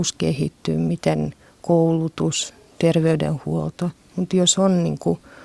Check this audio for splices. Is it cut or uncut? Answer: uncut